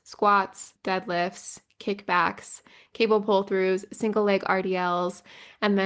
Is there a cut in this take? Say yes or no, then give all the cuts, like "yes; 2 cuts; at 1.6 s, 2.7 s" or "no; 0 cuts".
no; 0 cuts